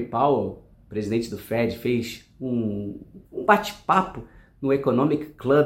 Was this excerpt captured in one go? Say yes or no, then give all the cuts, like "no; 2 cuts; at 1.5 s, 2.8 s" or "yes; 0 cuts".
no; 1 cut; at 3.2 s